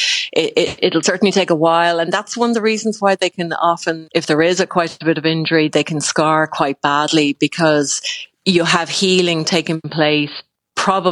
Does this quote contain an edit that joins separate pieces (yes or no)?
yes